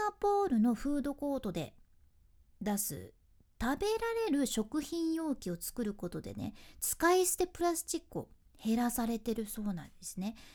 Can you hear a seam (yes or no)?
no